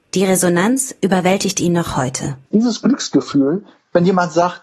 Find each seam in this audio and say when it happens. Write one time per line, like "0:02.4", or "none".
0:02.5